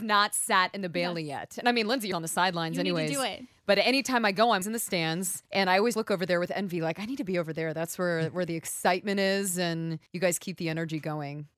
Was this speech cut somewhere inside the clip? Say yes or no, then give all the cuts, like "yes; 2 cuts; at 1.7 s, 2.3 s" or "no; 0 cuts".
yes; 5 cuts; at 2.1 s, 4.6 s, 5.5 s, 5.9 s, 10.1 s